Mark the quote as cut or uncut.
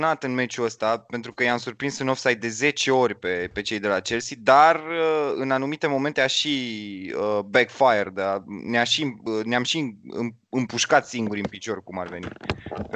uncut